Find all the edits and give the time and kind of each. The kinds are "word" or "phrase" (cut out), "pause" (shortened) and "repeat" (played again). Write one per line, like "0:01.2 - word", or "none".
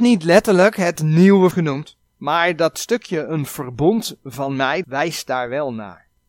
0:01.5 - word
0:02.1 - pause
0:04.8 - word